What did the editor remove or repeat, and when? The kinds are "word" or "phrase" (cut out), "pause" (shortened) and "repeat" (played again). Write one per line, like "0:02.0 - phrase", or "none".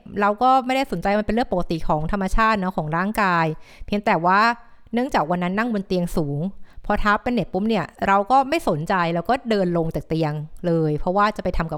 0:08.0 - pause